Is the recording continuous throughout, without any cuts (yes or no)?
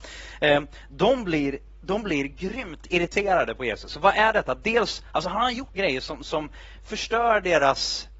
no